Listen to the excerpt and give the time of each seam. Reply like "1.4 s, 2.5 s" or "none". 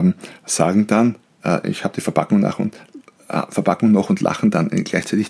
1.6 s